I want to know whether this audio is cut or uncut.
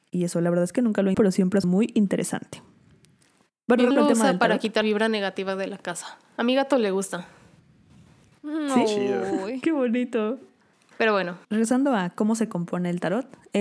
cut